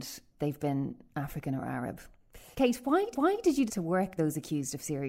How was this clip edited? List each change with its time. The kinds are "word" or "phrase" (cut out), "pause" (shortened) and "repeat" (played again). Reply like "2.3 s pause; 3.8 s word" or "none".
2.5 s pause; 3.1 s repeat; 3.7 s word; 4.2 s word